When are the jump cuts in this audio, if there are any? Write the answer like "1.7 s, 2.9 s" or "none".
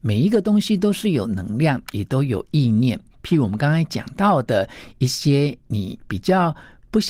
none